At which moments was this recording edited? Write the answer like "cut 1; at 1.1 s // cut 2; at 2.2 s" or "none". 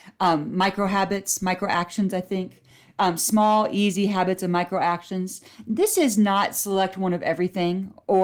none